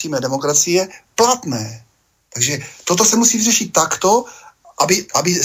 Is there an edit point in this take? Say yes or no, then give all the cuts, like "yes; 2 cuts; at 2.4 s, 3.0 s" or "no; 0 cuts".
no; 0 cuts